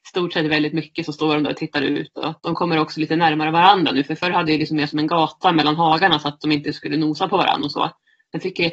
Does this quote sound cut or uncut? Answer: cut